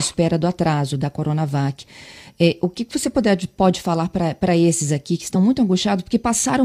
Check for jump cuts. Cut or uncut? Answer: uncut